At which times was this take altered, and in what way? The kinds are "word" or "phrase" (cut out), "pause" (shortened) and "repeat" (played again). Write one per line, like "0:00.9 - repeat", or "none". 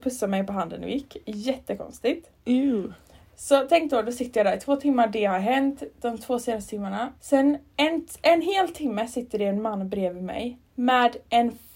0:02.4 - pause
0:07.2 - pause
0:10.7 - pause